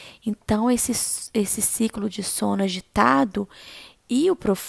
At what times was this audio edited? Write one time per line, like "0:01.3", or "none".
none